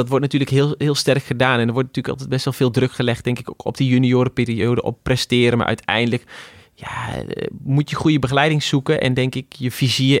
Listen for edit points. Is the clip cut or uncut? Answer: uncut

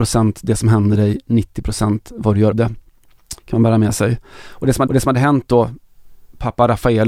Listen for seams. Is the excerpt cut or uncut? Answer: cut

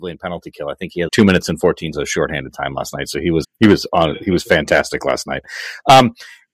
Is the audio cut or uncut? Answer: cut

